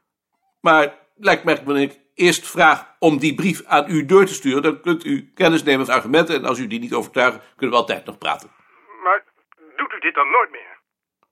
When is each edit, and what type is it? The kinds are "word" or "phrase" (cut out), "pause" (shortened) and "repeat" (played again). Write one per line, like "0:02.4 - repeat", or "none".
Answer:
0:01.7 - word
0:05.9 - word